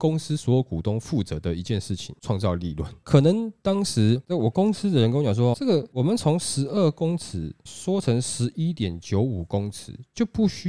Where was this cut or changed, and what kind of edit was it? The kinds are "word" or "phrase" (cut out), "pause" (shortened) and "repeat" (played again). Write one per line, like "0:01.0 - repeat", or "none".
0:05.5 - word

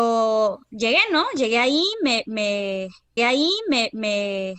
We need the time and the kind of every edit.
0:03.2 - repeat

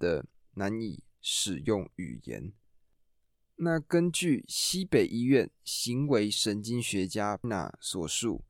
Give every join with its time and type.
0:07.4 - phrase

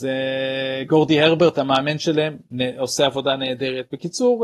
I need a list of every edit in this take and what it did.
none

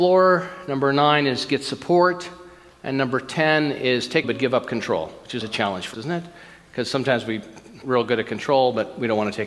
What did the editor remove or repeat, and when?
0:04.2 - word
0:05.4 - word
0:05.9 - word
0:07.8 - word

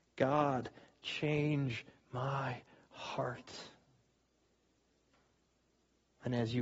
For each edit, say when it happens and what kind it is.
none

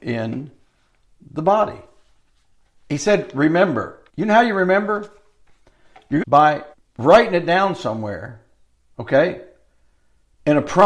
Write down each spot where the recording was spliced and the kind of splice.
0:02.3 - pause
0:04.1 - pause
0:06.2 - phrase
0:06.7 - pause

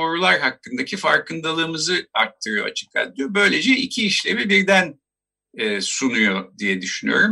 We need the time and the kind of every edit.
none

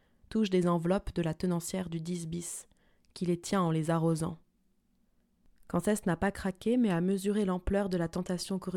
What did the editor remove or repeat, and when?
none

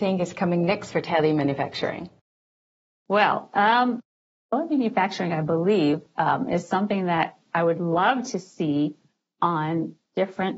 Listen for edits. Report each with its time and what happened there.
none

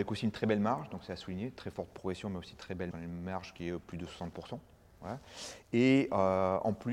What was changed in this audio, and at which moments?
0:02.9 - word

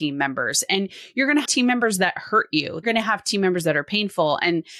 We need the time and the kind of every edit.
0:01.4 - word
0:02.8 - word

